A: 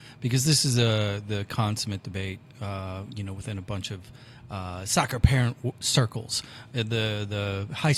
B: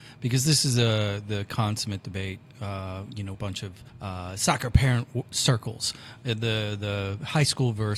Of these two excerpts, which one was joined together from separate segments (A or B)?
B